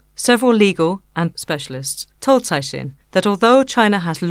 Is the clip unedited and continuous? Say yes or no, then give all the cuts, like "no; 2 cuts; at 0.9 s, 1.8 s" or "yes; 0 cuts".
no; 3 cuts; at 1.3 s, 2.1 s, 3.0 s